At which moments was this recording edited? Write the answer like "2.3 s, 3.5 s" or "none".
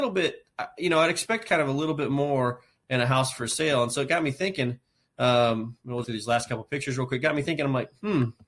6.0 s